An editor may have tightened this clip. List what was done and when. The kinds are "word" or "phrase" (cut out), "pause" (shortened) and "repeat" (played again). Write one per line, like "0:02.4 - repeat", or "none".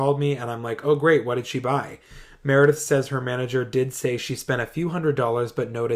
none